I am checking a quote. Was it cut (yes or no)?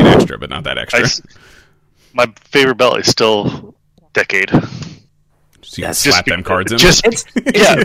no